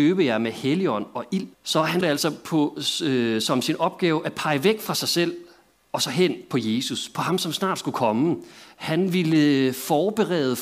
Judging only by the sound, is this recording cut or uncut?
cut